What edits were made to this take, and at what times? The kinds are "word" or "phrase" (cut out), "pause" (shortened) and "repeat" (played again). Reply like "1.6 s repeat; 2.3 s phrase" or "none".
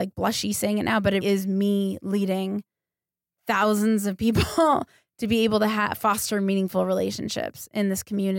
1.2 s word